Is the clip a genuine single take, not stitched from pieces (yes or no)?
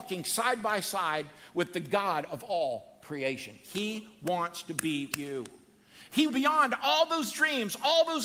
no